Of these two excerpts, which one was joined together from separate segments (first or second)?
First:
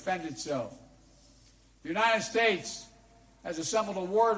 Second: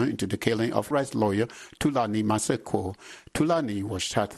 second